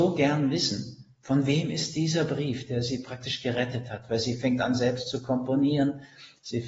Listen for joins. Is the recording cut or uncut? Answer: uncut